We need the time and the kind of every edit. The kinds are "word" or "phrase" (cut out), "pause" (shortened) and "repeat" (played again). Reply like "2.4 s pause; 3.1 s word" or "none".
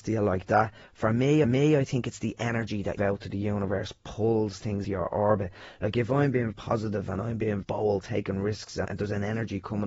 1.4 s repeat; 3.0 s phrase; 4.8 s word; 6.5 s word; 7.6 s word; 8.9 s word